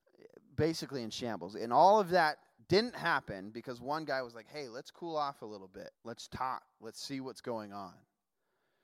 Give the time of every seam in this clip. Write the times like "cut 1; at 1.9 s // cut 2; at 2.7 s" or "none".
cut 1; at 2.6 s // cut 2; at 5.9 s